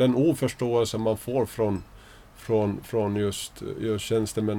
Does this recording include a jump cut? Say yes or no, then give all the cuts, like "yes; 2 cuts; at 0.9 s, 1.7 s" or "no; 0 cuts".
no; 0 cuts